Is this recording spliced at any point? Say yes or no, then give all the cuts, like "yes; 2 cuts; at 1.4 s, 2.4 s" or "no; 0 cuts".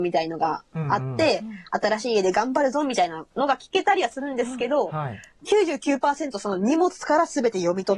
yes; 1 cut; at 3.3 s